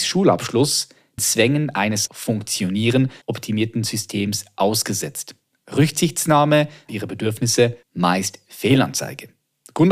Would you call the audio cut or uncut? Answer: cut